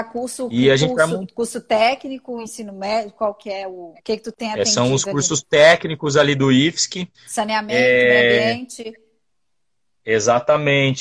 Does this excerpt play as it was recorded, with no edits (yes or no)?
no